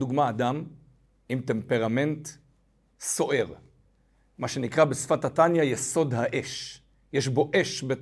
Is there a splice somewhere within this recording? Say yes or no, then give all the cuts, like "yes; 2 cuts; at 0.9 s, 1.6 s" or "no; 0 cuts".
no; 0 cuts